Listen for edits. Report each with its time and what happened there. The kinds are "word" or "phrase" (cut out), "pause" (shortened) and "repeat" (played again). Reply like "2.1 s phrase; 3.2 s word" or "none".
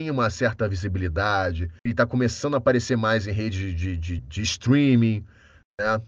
1.8 s pause; 4.2 s word